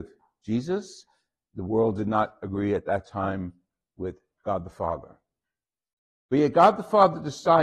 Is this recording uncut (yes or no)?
yes